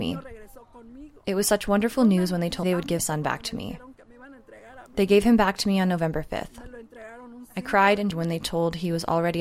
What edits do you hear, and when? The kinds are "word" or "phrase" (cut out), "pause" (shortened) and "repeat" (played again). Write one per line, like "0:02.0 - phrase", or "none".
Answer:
0:02.6 - word
0:03.0 - word
0:08.1 - word

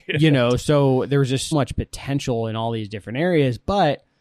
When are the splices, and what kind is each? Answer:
0:01.5 - word

